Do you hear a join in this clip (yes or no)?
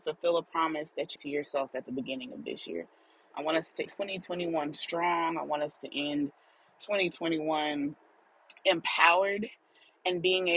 yes